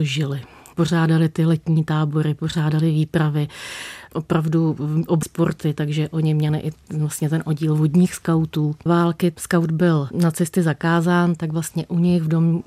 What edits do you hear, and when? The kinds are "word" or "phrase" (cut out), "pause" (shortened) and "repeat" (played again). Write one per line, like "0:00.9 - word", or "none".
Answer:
0:05.2 - phrase
0:08.9 - phrase